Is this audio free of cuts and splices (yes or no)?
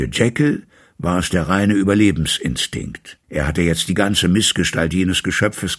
no